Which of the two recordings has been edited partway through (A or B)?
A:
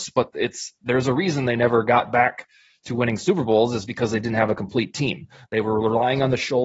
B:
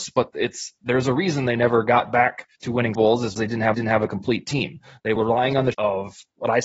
B